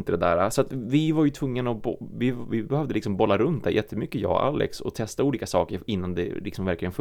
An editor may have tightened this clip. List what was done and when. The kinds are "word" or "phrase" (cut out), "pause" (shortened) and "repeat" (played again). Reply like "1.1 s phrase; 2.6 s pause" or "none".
none